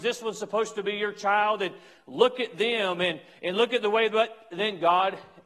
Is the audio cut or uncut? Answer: uncut